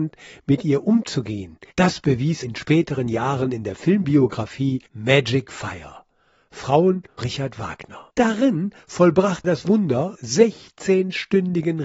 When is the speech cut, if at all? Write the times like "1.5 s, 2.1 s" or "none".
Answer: 1.7 s, 2.4 s, 4.9 s, 7.2 s, 8.1 s, 9.4 s, 10.2 s